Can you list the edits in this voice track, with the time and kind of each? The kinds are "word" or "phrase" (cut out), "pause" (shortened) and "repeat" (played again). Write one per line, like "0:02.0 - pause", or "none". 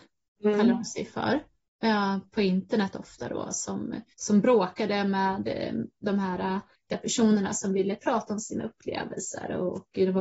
0:04.1 - pause